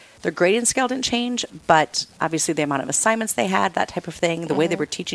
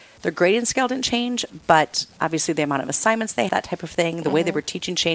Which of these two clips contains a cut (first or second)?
second